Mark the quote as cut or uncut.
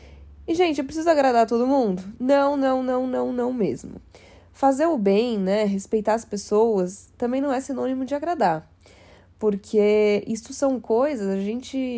uncut